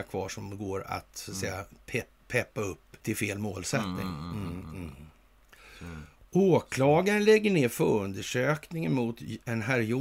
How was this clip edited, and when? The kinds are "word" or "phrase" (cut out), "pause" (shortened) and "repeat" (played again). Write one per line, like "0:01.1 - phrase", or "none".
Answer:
0:03.0 - pause
0:06.3 - pause